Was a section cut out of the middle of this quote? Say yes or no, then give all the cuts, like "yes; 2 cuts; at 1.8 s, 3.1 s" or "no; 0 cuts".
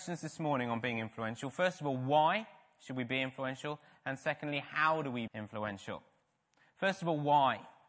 yes; 1 cut; at 5.3 s